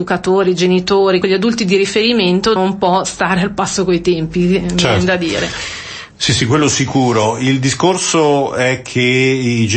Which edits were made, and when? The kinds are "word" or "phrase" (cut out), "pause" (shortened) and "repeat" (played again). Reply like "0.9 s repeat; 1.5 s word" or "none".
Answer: 1.2 s word; 2.6 s word